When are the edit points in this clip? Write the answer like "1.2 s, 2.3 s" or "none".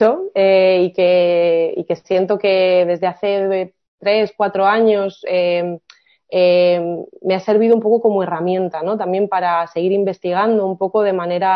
none